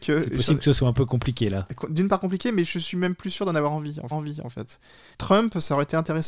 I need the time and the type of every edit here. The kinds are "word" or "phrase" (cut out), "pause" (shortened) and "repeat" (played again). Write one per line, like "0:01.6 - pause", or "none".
0:04.1 - repeat